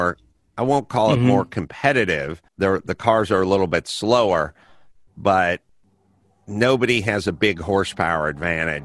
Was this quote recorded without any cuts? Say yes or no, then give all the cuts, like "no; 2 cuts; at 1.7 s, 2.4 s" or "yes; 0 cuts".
no; 1 cut; at 2.5 s